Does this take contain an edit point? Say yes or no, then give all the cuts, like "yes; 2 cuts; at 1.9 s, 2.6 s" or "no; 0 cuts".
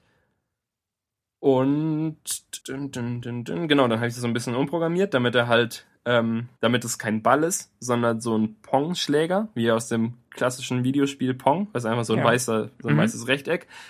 yes; 2 cuts; at 2.6 s, 6.6 s